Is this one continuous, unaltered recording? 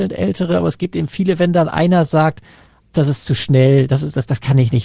no; 1 cut; at 2.9 s

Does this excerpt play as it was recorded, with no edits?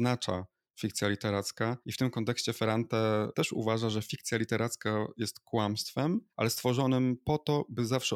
no; 2 cuts; at 1.8 s, 6.3 s

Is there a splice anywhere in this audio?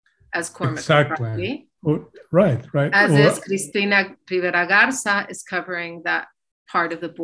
no; 0 cuts

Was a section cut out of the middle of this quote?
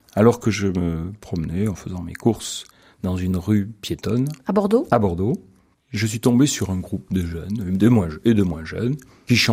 no; 0 cuts

